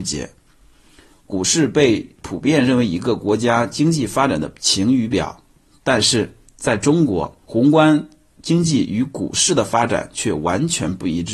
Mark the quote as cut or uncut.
cut